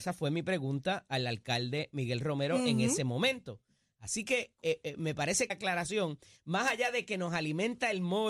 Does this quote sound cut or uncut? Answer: cut